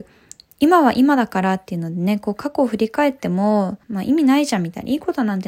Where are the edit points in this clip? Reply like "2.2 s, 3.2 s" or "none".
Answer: 3.8 s